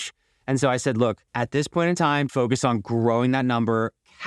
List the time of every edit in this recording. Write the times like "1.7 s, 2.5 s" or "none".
1.3 s, 2.3 s